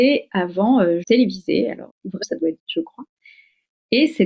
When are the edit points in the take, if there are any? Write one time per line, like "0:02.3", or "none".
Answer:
0:01.0
0:01.9
0:02.2
0:02.6

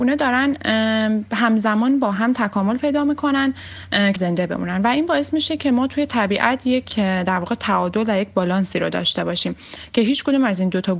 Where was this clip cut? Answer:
0:04.2

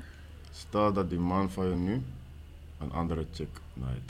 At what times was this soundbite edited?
none

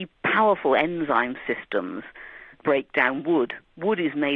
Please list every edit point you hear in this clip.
0:02.5

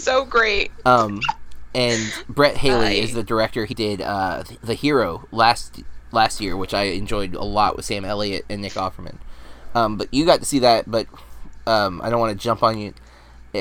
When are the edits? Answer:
0:03.7

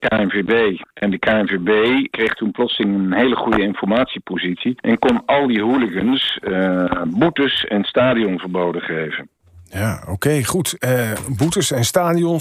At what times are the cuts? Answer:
none

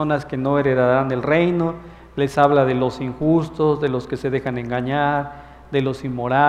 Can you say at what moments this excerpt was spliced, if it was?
none

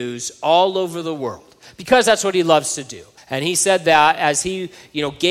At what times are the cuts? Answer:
0:03.2

